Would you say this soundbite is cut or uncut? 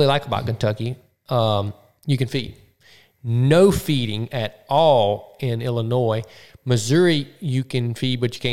uncut